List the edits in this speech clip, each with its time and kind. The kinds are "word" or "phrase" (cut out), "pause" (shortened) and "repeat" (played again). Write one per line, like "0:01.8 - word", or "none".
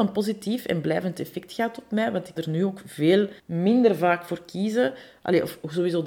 0:02.4 - word
0:03.4 - pause